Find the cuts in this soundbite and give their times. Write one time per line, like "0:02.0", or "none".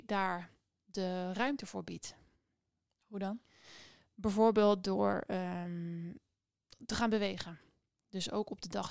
none